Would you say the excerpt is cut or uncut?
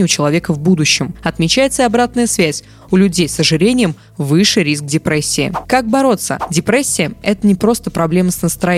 uncut